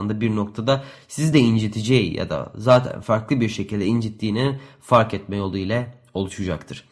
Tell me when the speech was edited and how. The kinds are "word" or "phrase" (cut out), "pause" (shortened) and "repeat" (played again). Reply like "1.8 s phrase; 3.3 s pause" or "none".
none